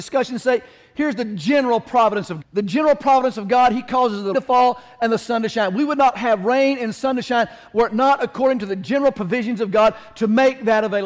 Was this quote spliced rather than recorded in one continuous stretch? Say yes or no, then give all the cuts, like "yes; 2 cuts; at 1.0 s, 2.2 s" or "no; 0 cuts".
yes; 2 cuts; at 2.4 s, 4.3 s